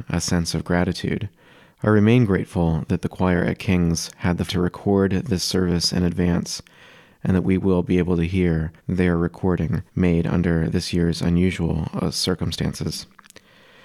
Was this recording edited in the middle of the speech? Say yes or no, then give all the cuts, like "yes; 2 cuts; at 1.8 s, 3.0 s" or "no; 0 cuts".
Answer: yes; 3 cuts; at 4.5 s, 8.8 s, 9.9 s